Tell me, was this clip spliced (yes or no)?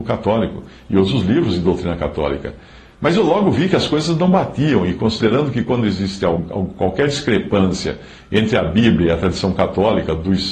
no